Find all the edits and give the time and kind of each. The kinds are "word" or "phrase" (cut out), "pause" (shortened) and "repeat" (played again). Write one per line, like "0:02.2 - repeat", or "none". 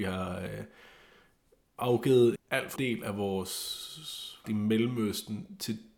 0:02.4 - word
0:02.8 - word
0:04.4 - word